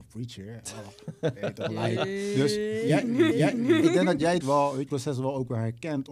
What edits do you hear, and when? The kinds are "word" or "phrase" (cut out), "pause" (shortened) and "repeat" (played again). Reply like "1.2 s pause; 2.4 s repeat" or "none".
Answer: 3.3 s repeat; 4.4 s word; 4.9 s phrase